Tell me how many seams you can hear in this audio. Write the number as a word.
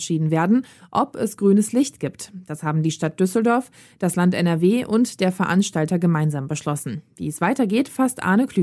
zero